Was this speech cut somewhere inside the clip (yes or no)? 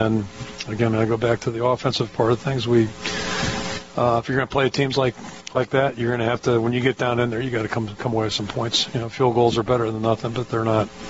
no